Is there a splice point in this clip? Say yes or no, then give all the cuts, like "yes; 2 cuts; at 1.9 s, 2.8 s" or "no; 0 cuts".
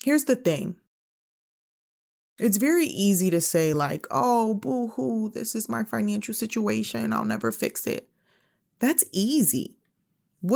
no; 0 cuts